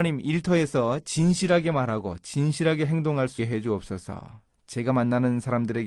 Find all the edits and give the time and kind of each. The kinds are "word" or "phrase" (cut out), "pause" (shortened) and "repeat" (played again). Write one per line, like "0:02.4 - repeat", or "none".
0:03.4 - word